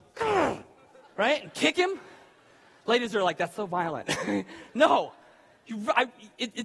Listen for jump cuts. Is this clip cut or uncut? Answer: uncut